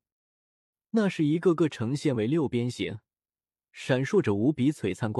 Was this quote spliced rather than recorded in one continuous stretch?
no; 0 cuts

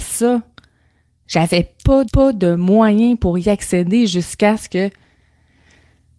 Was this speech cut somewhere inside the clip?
yes; 1 cut; at 2.0 s

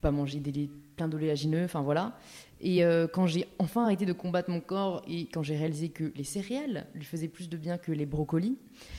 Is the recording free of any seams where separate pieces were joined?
yes; 0 cuts

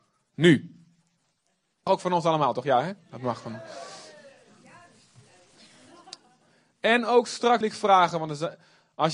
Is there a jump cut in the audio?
yes; 2 cuts; at 1.9 s, 7.6 s

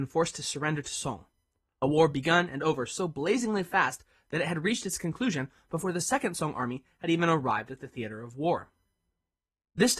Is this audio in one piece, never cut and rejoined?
yes; 0 cuts

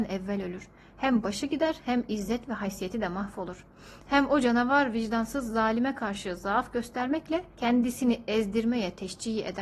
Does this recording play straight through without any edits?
no; 1 cut; at 7.5 s

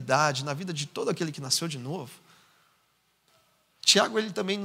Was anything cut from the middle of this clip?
no; 0 cuts

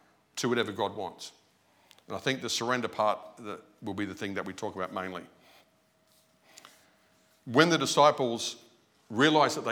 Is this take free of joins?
yes; 0 cuts

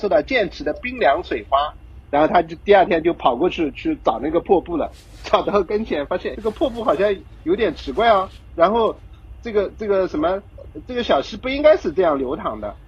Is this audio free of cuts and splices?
no; 1 cut; at 6.3 s

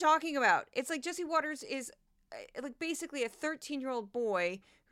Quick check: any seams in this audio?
no; 0 cuts

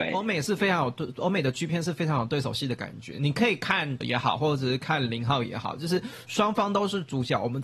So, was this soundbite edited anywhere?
yes; 1 cut; at 4.0 s

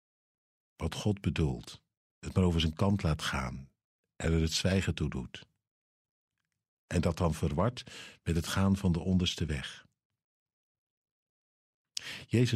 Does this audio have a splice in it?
no; 0 cuts

